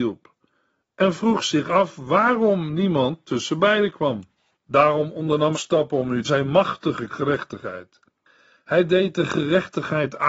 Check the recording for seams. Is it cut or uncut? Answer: cut